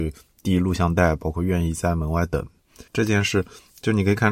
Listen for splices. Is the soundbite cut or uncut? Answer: cut